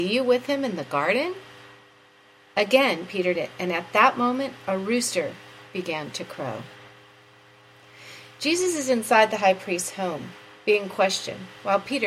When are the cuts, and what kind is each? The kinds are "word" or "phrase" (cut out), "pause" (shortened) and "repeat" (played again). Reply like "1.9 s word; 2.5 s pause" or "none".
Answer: 3.3 s word